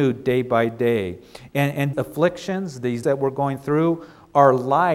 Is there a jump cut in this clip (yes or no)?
yes